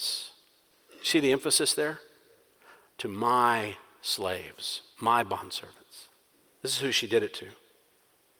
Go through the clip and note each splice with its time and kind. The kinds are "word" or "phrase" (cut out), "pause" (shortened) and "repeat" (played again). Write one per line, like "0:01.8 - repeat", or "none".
none